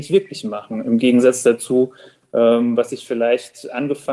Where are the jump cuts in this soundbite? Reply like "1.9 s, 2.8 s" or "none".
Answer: none